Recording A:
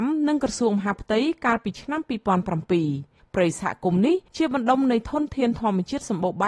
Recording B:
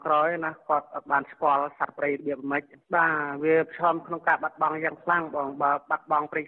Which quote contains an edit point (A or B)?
A